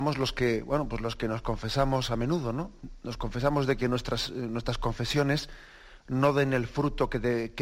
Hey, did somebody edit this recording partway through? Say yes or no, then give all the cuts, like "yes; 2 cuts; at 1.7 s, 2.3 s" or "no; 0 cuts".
no; 0 cuts